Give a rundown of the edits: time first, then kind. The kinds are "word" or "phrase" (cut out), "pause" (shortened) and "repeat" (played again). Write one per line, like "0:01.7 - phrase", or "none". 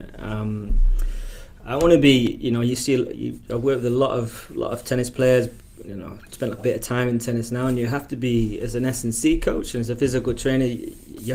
0:06.6 - word